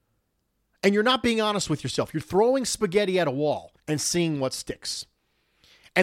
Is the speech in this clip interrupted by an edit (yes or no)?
yes